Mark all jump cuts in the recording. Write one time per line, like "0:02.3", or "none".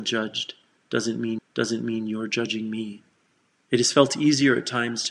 0:01.4
0:03.2

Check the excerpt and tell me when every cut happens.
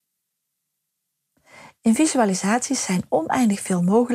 none

